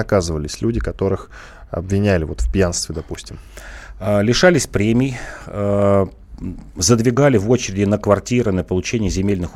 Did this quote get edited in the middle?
no; 0 cuts

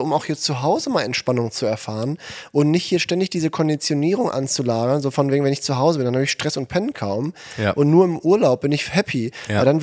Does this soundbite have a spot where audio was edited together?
no; 0 cuts

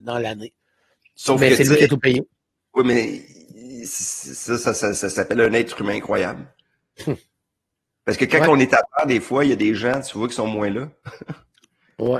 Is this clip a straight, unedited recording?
yes; 0 cuts

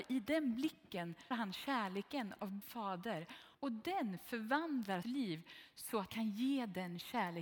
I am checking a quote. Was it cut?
yes; 5 cuts; at 1.3 s, 2.6 s, 3.5 s, 5.0 s, 6.1 s

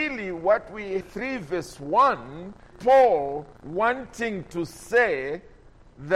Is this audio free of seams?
no; 3 cuts; at 1.0 s, 2.7 s, 3.6 s

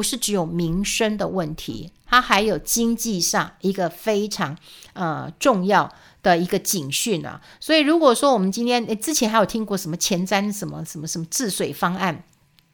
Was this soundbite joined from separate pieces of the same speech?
no; 0 cuts

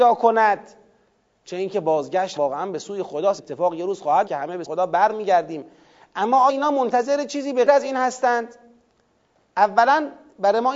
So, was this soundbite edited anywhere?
yes; 6 cuts; at 2.4 s, 3.4 s, 4.3 s, 4.6 s, 6.5 s, 7.7 s

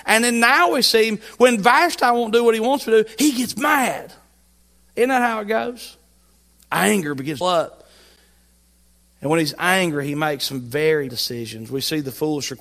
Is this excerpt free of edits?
no; 2 cuts; at 7.4 s, 11.1 s

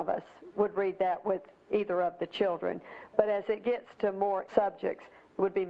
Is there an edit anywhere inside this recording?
yes; 1 cut; at 4.5 s

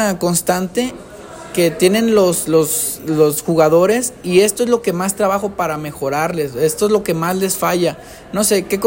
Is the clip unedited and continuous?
yes; 0 cuts

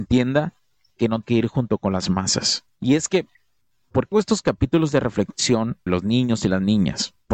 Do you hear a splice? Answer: yes; 3 cuts; at 1.2 s, 4.1 s, 5.9 s

